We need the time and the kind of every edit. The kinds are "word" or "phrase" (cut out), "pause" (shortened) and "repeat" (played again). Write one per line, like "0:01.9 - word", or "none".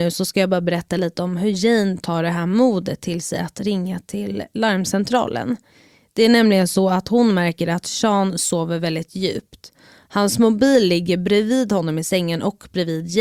none